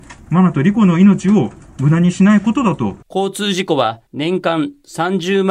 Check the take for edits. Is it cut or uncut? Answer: cut